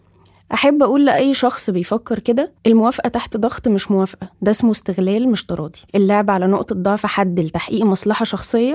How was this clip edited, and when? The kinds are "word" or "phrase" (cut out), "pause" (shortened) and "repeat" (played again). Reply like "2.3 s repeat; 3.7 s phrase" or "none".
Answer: 2.6 s pause; 4.3 s pause; 5.9 s pause